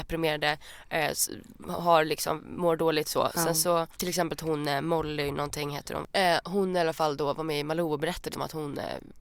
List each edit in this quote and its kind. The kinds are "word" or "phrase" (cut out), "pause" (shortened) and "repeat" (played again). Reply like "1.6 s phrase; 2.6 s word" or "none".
3.9 s pause; 8.3 s word